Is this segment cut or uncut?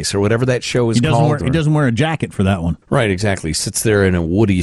cut